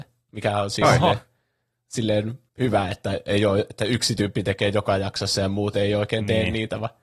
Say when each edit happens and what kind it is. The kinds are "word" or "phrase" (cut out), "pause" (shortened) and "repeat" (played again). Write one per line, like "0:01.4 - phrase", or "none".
0:02.5 - pause